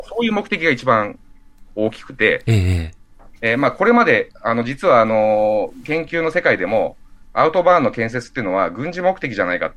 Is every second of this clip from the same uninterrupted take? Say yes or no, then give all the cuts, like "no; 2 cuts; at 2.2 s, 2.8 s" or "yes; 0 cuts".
yes; 0 cuts